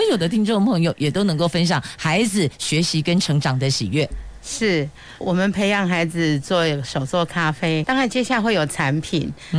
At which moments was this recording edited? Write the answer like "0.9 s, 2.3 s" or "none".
5.2 s, 7.8 s